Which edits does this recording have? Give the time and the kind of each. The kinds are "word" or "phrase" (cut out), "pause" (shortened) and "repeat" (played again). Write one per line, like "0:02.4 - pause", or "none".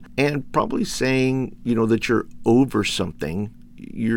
none